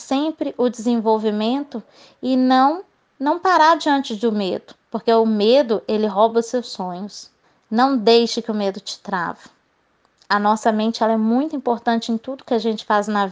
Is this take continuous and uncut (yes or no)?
no